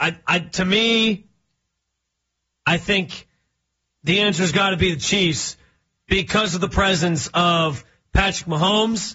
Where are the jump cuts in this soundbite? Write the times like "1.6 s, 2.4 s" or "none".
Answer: none